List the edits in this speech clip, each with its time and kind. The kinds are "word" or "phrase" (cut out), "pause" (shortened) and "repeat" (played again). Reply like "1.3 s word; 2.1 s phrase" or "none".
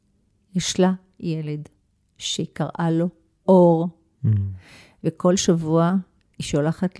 none